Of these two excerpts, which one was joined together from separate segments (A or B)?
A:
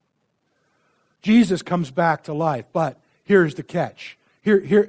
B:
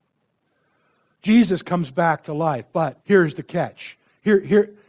B